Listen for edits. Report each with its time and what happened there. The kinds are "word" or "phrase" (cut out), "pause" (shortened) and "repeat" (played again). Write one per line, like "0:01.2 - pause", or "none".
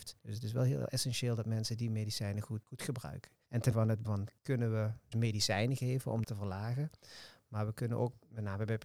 0:02.6 - word
0:03.7 - word
0:04.0 - word
0:04.4 - word
0:05.1 - word
0:06.2 - word